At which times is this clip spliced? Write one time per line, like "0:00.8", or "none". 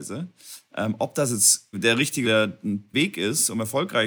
0:01.7
0:02.2
0:02.9